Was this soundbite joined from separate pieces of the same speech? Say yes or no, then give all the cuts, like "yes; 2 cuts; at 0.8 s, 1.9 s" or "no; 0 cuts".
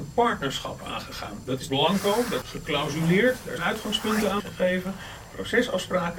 yes; 4 cuts; at 1.7 s, 2.4 s, 3.6 s, 4.4 s